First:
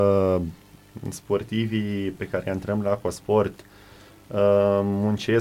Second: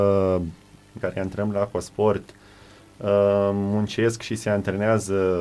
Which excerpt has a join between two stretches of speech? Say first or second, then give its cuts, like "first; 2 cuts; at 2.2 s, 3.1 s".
second; 1 cut; at 1.0 s